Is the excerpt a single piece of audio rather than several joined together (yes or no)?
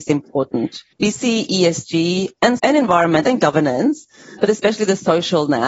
no